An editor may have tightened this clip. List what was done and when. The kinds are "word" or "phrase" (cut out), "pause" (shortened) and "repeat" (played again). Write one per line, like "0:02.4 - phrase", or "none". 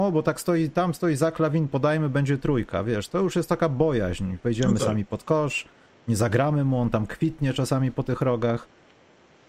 none